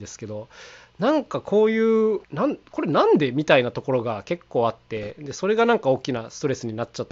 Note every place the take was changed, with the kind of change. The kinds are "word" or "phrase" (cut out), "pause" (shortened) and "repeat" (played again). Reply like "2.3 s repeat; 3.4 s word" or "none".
2.2 s pause